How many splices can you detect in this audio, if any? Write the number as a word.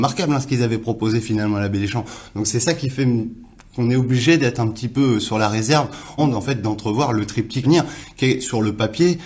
two